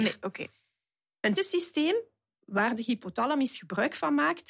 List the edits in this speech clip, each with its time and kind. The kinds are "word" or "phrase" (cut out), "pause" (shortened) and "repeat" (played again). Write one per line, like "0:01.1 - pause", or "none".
0:01.4 - word